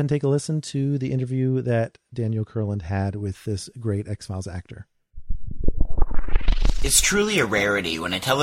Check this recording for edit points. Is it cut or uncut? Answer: uncut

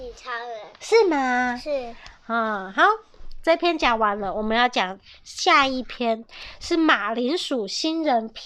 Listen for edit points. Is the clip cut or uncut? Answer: uncut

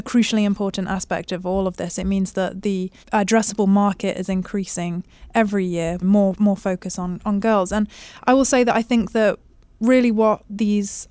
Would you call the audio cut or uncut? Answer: cut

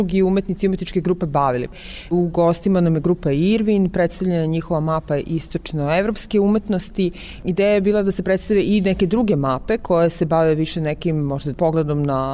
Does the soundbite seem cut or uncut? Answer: uncut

